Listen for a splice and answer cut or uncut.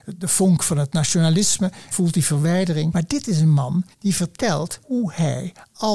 cut